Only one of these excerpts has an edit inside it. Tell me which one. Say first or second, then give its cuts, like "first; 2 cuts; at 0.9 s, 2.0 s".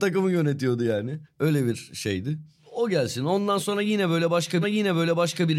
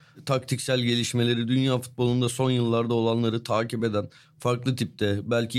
first; 1 cut; at 4.6 s